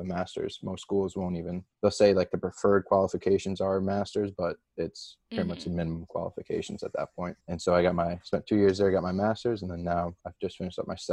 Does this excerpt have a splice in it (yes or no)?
yes